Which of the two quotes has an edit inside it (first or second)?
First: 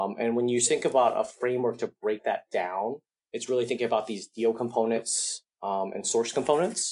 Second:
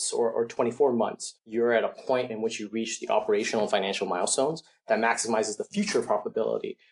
second